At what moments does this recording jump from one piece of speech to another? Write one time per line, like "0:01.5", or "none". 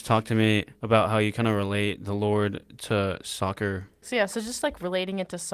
none